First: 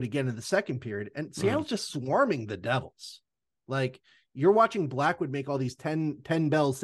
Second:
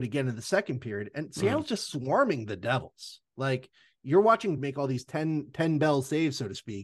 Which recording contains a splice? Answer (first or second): second